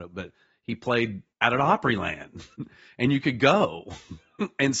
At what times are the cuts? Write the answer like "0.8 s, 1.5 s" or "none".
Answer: 1.3 s, 2.5 s